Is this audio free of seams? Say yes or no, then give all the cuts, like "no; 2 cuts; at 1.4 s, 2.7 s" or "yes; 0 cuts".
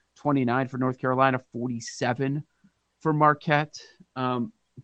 yes; 0 cuts